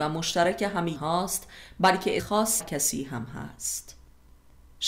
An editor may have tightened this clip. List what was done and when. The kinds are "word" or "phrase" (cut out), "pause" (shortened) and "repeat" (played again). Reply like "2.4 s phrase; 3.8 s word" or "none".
0.9 s word; 2.2 s word; 2.6 s word